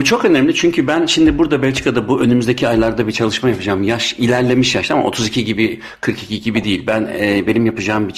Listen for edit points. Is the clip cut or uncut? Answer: uncut